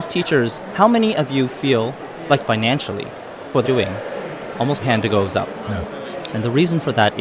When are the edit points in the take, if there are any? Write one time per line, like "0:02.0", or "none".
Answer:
0:02.4
0:03.6
0:04.8